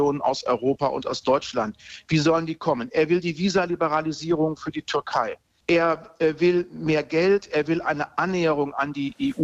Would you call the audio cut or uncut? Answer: uncut